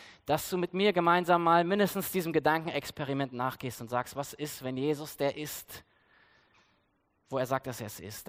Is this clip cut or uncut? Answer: uncut